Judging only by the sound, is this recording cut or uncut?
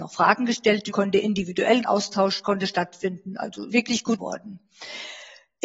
cut